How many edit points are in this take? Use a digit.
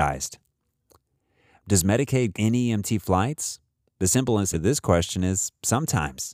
2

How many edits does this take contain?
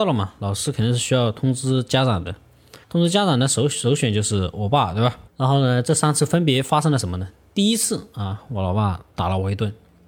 3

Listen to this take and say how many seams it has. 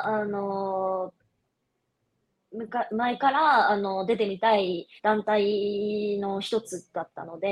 1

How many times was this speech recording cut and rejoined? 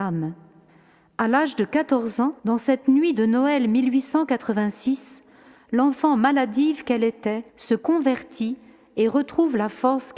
2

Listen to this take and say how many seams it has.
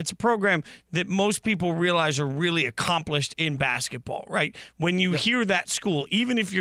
0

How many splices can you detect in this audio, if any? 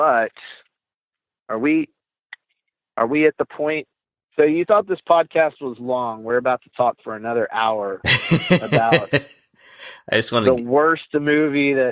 0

